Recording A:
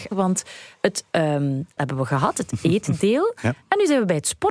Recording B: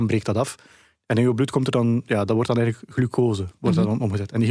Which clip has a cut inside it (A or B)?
A